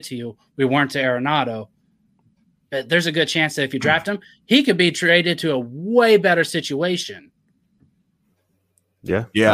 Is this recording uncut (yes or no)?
yes